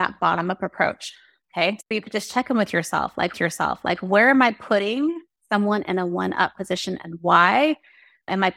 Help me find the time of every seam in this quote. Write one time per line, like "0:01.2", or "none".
0:01.9
0:03.3